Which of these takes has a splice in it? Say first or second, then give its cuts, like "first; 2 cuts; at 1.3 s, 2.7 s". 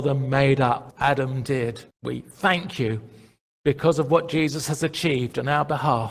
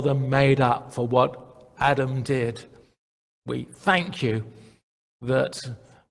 first; 3 cuts; at 0.9 s, 1.9 s, 3.5 s